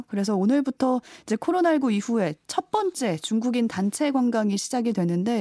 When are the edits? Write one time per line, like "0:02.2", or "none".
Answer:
none